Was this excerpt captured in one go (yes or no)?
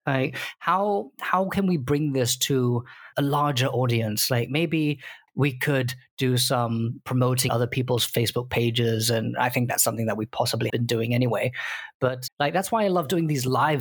no